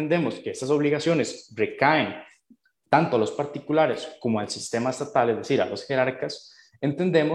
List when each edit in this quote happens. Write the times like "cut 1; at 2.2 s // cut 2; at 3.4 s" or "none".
none